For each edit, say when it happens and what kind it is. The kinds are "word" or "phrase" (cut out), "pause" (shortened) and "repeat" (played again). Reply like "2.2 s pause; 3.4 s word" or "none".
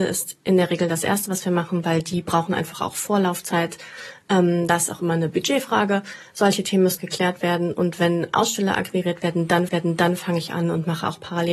7.0 s word; 9.7 s repeat